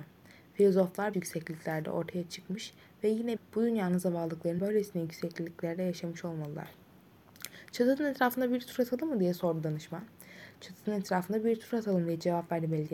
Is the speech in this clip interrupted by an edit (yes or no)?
yes